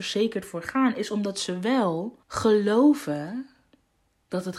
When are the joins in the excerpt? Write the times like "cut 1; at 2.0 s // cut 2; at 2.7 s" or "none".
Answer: cut 1; at 2.2 s